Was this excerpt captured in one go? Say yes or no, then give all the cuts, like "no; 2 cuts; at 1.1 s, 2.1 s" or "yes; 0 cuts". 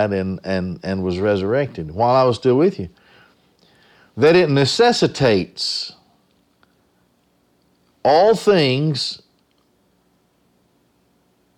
yes; 0 cuts